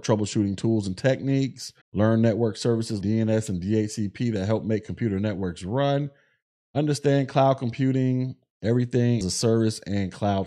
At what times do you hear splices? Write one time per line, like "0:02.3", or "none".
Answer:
0:01.8
0:03.0
0:09.2